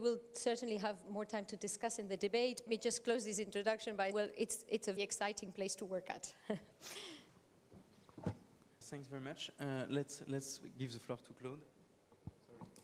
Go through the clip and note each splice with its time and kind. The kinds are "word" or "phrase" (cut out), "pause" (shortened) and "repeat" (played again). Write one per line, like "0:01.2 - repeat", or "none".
0:02.7 - phrase
0:04.1 - word
0:05.0 - word
0:08.8 - word